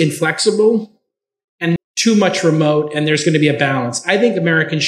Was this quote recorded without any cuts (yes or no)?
no